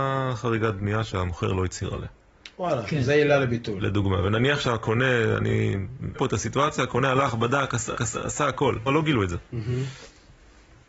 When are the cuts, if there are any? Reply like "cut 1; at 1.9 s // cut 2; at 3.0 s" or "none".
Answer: cut 1; at 6.1 s // cut 2; at 7.9 s // cut 3; at 8.9 s